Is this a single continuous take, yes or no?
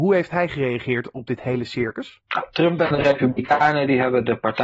yes